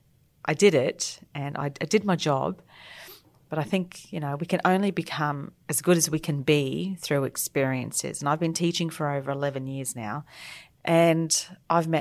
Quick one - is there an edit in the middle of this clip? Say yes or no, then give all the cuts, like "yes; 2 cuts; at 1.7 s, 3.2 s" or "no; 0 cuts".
no; 0 cuts